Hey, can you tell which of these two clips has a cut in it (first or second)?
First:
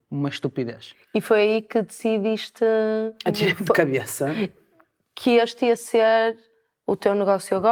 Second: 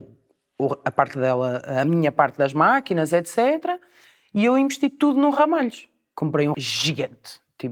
second